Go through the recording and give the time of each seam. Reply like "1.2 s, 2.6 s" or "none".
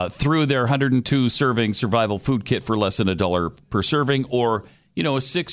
none